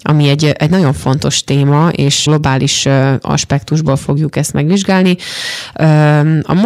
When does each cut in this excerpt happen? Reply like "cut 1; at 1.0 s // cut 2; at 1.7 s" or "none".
cut 1; at 2.3 s